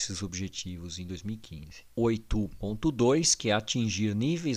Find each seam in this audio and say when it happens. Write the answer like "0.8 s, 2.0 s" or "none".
none

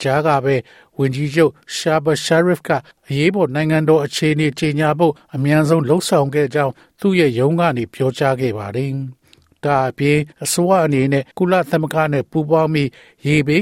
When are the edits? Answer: 2.9 s, 10.3 s, 11.3 s

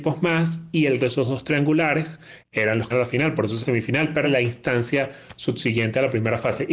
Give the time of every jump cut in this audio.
1.0 s, 2.9 s, 3.6 s, 4.2 s

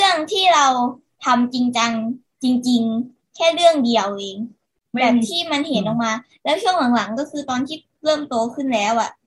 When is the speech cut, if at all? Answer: none

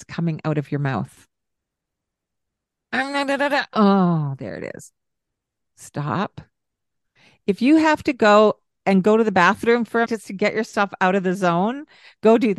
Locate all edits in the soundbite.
10.1 s

